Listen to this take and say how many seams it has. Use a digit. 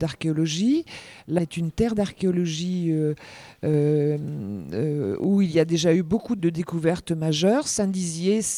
2